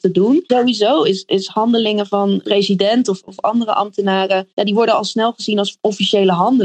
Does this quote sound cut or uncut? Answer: cut